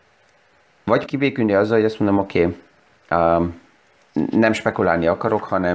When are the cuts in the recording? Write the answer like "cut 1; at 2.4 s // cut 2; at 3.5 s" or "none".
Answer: cut 1; at 1.1 s